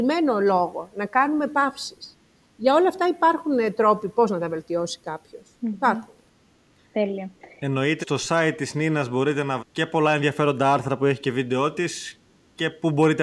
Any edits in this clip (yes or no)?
yes